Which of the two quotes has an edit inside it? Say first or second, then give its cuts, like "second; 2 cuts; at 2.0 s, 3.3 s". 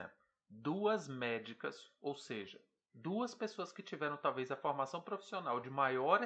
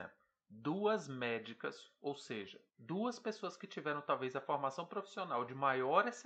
second; 1 cut; at 2.7 s